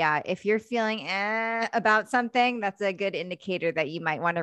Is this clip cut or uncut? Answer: uncut